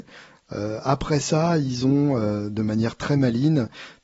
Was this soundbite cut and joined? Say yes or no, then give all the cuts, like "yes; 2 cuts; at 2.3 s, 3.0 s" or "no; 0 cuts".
no; 0 cuts